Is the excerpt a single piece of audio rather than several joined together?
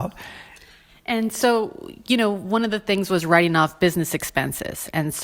yes; 0 cuts

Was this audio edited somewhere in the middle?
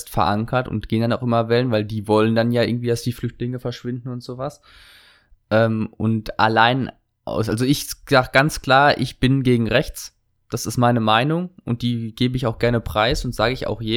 no; 0 cuts

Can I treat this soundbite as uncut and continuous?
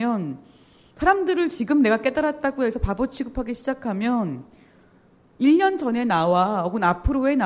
yes; 0 cuts

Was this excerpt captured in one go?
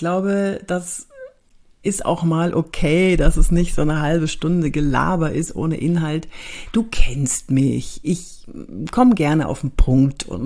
yes; 0 cuts

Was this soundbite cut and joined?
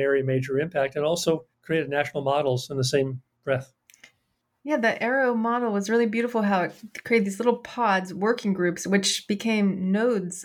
yes; 2 cuts; at 1.5 s, 3.3 s

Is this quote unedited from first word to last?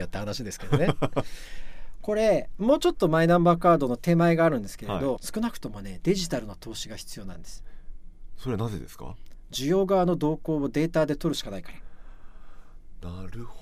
no; 1 cut; at 5.2 s

